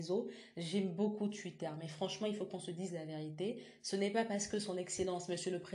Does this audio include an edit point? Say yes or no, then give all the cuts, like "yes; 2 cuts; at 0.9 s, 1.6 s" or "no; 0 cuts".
no; 0 cuts